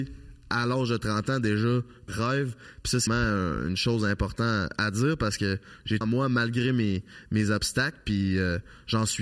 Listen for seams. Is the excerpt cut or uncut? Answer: cut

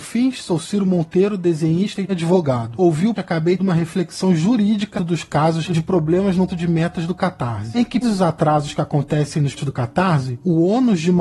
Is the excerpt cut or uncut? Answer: cut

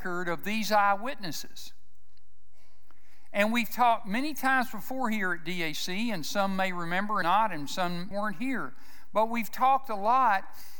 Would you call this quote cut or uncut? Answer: cut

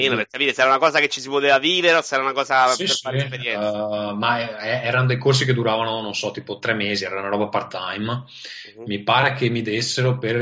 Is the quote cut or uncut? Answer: uncut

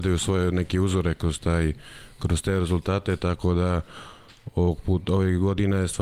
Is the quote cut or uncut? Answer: uncut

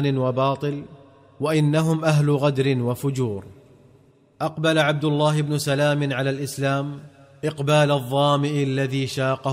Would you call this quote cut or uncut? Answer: uncut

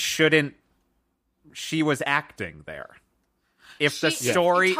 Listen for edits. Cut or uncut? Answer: uncut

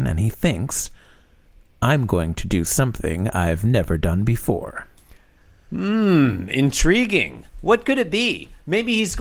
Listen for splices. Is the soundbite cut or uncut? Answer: uncut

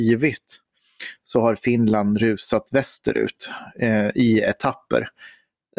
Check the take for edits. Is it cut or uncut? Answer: uncut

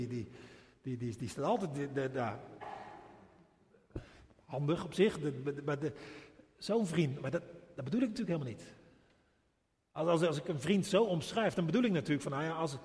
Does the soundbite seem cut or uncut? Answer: uncut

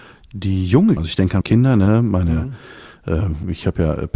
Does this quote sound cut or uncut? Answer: cut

